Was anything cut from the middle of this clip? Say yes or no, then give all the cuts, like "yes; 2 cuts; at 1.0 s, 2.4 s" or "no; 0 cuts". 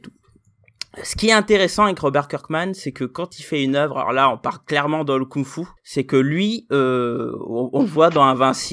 yes; 1 cut; at 5.8 s